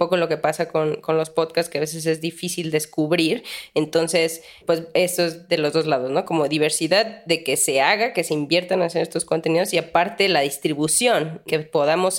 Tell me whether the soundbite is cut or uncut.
uncut